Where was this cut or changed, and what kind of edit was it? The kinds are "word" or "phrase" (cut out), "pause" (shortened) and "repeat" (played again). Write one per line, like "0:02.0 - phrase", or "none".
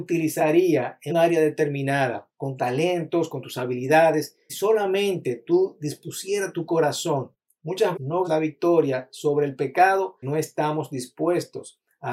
0:01.1 - word
0:02.6 - word
0:04.5 - word
0:07.9 - word
0:08.2 - word
0:10.2 - word